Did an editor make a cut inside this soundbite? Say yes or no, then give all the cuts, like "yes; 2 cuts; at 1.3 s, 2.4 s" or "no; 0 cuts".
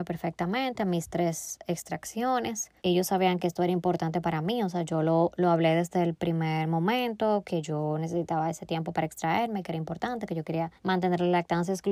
yes; 2 cuts; at 2.8 s, 10.8 s